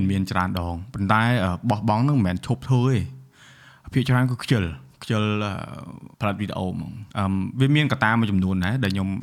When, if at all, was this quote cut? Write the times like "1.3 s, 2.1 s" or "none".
6.1 s, 7.1 s